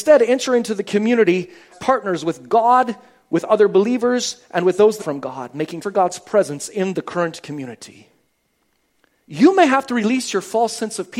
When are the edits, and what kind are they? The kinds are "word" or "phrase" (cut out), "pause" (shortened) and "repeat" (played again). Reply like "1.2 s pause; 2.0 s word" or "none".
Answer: 1.7 s word; 5.0 s phrase; 5.8 s word